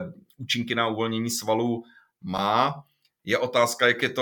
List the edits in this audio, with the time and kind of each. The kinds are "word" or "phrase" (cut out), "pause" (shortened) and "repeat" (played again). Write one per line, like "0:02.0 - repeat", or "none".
none